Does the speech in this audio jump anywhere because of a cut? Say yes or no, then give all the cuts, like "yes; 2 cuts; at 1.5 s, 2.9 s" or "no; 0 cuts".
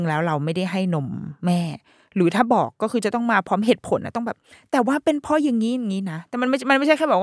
no; 0 cuts